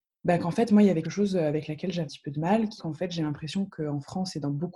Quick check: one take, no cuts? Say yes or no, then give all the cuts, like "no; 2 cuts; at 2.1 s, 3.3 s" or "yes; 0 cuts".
no; 3 cuts; at 1.0 s, 2.0 s, 2.8 s